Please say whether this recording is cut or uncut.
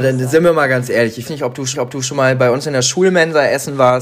cut